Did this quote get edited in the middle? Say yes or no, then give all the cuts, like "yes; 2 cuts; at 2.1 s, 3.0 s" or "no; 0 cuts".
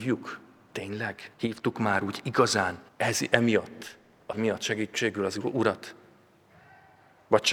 yes; 3 cuts; at 1.3 s, 2.9 s, 4.3 s